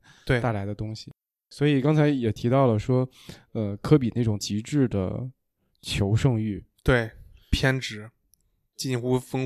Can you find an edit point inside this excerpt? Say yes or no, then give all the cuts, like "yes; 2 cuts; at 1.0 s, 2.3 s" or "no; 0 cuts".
no; 0 cuts